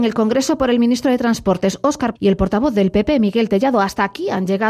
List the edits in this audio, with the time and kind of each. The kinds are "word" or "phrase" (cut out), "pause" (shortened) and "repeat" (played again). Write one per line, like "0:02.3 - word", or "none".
0:02.2 - word